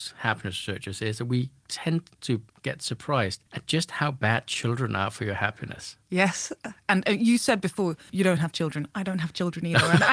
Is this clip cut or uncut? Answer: cut